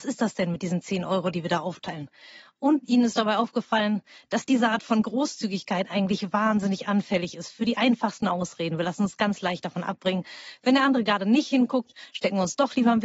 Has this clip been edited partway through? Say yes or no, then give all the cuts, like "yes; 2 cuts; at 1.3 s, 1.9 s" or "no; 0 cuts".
no; 0 cuts